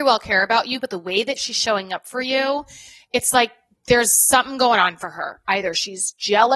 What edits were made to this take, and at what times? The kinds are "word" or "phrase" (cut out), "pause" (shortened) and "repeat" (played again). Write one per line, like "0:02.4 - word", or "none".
none